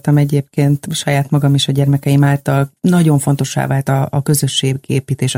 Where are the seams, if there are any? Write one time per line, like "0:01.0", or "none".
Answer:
none